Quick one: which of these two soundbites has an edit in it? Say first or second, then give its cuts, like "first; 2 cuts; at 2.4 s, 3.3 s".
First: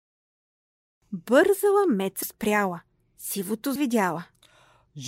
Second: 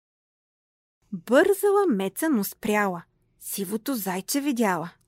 first; 2 cuts; at 2.2 s, 3.8 s